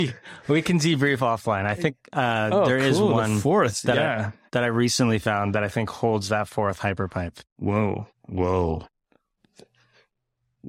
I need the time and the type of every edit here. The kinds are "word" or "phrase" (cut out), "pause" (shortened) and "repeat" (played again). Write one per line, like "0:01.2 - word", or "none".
0:08.1 - pause

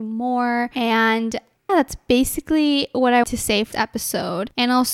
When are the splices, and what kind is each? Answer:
0:01.7 - word
0:03.2 - word
0:03.7 - word

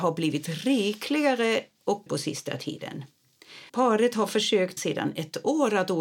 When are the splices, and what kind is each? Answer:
0:02.1 - word
0:03.7 - pause
0:04.8 - word

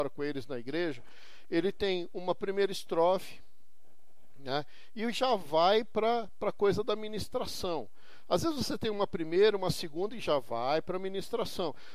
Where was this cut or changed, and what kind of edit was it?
none

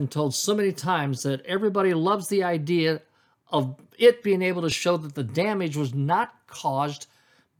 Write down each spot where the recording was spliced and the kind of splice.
none

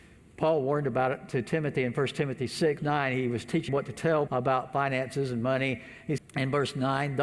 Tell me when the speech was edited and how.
0:02.8 - word
0:03.7 - word
0:04.3 - word
0:06.2 - word

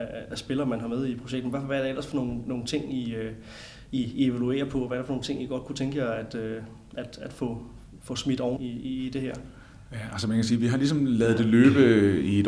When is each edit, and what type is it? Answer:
0:08.6 - word

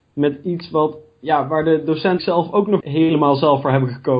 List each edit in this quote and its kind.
0:02.2 - word
0:02.8 - word

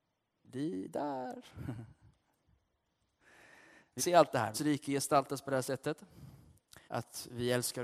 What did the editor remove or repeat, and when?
0:04.0 - word
0:04.5 - phrase
0:06.9 - pause

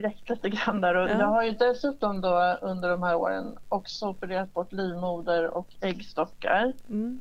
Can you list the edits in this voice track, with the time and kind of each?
none

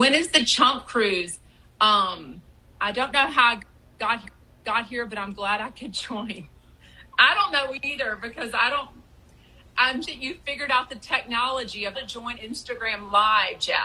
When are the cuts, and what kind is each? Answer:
0:04.2 - repeat
0:10.0 - word
0:11.9 - word
0:12.3 - word

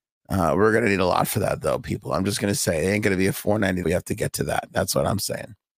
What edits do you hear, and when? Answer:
0:03.8 - phrase

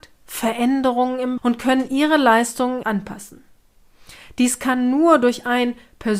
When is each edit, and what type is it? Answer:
0:01.4 - word
0:02.8 - word

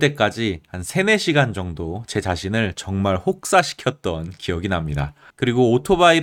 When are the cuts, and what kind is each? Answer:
0:05.3 - pause

